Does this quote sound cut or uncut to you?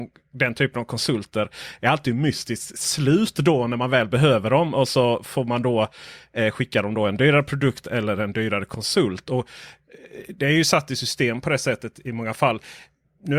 uncut